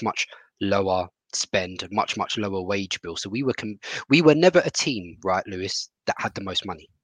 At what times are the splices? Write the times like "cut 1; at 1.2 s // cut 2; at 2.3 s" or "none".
cut 1; at 6.0 s